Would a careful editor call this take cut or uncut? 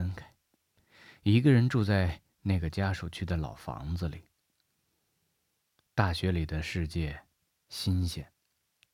uncut